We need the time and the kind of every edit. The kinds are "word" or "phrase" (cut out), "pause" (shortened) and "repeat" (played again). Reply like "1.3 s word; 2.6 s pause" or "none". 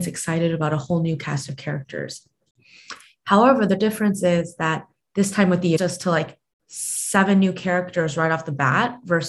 5.8 s phrase